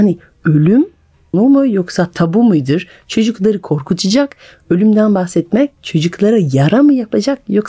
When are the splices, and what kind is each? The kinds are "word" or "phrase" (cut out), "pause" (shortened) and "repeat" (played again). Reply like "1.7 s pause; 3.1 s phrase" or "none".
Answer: 1.3 s phrase